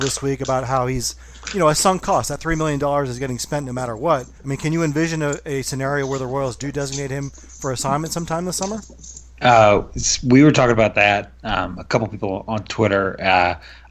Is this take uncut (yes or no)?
no